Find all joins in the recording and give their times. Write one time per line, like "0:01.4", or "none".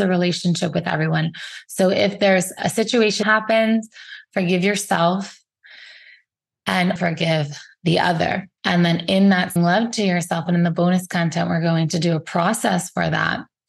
0:03.2
0:07.0
0:08.6
0:09.6
0:10.5